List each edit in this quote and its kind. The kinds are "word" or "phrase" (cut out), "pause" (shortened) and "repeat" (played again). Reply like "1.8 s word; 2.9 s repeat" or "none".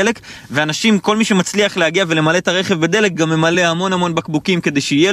none